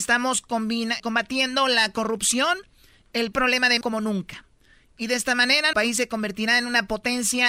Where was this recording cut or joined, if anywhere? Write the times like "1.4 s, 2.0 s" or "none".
1.0 s, 3.3 s, 3.8 s, 5.7 s

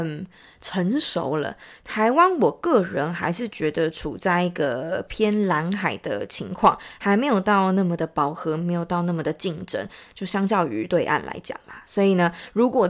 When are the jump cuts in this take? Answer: none

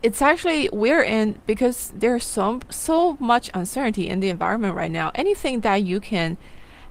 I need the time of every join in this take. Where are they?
none

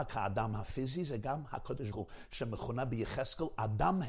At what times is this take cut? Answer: 1.9 s

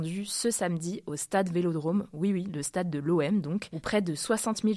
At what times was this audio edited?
none

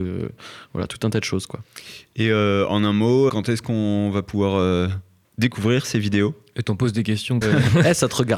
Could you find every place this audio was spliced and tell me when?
3.3 s, 5.2 s, 7.4 s

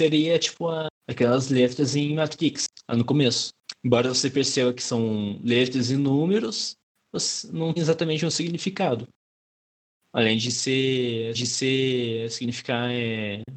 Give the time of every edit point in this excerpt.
7.8 s, 11.3 s

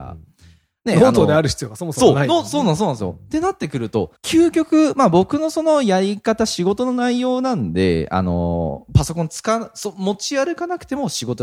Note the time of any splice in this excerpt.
4.2 s

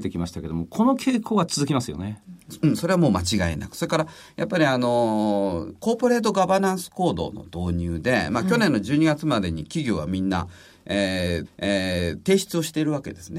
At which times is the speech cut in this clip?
11.4 s

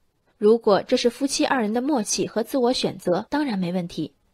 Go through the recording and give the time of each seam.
3.3 s

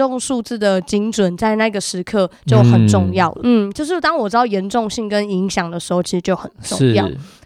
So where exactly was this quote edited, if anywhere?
3.4 s

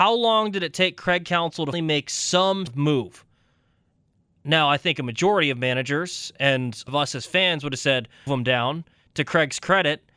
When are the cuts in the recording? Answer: 1.7 s, 2.7 s, 6.9 s, 8.3 s

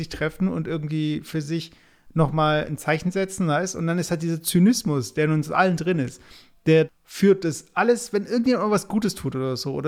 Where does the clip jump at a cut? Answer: 6.9 s

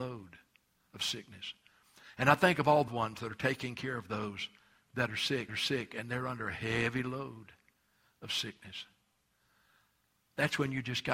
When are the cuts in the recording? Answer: 2.9 s, 5.5 s

